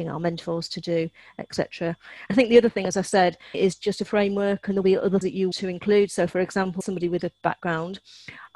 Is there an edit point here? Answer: yes; 7 cuts; at 2.3 s, 3.5 s, 4.8 s, 5.2 s, 5.5 s, 6.8 s, 7.4 s

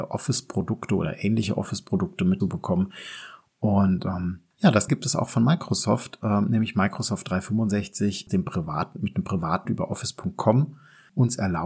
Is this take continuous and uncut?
no; 4 cuts; at 2.4 s, 4.9 s, 8.3 s, 9.6 s

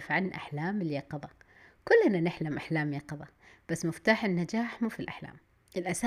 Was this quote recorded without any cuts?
yes; 0 cuts

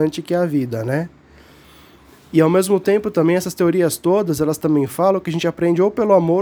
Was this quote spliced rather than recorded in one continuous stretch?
no; 0 cuts

